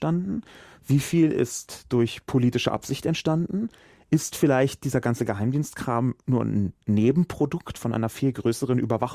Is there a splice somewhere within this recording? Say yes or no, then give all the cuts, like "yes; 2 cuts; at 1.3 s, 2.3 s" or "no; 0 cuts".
no; 0 cuts